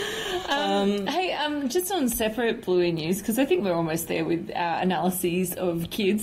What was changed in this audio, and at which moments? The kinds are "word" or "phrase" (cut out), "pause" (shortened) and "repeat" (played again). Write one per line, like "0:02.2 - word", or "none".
none